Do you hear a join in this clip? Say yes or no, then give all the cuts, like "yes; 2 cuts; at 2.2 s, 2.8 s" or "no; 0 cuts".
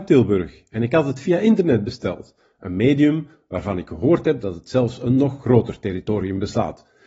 no; 0 cuts